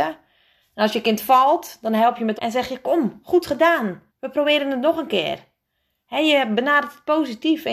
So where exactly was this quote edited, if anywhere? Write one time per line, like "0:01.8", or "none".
0:02.4
0:04.1